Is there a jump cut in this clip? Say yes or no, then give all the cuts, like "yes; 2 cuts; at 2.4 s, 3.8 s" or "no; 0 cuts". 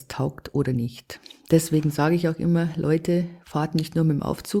no; 0 cuts